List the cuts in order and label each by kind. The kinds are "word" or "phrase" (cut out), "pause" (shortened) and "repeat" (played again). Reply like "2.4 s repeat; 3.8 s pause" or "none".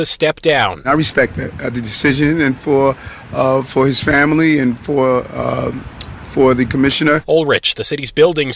none